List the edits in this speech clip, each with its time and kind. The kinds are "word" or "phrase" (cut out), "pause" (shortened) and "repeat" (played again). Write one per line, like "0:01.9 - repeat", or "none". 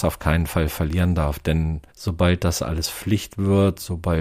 0:01.9 - pause